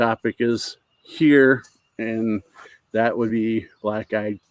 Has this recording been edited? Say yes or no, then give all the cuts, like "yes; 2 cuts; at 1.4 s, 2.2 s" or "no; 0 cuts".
no; 0 cuts